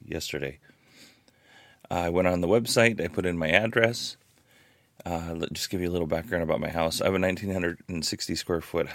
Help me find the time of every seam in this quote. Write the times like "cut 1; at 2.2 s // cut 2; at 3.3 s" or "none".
none

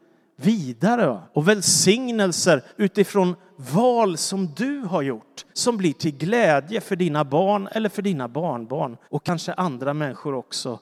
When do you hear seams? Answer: cut 1; at 1.3 s // cut 2; at 2.7 s // cut 3; at 5.5 s // cut 4; at 9.0 s

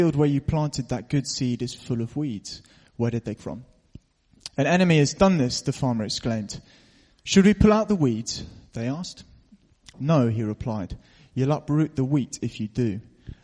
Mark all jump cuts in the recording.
cut 1; at 3.4 s

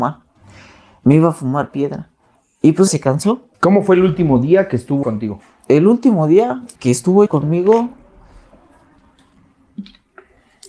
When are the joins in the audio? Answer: cut 1; at 2.4 s // cut 2; at 2.9 s // cut 3; at 3.5 s // cut 4; at 5.0 s // cut 5; at 6.8 s // cut 6; at 7.3 s

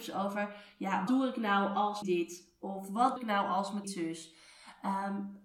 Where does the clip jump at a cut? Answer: cut 1; at 1.1 s // cut 2; at 2.0 s // cut 3; at 3.2 s // cut 4; at 3.8 s

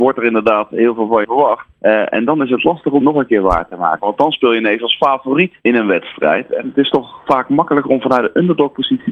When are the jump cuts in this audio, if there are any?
cut 1; at 1.2 s // cut 2; at 1.7 s // cut 3; at 3.0 s // cut 4; at 5.6 s

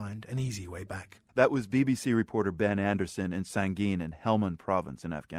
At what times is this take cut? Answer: cut 1; at 1.3 s

